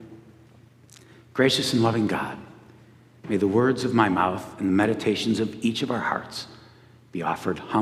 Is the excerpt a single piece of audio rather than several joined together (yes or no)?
yes